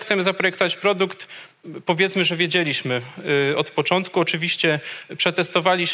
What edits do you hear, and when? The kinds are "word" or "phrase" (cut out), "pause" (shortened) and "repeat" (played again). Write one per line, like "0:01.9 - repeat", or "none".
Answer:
none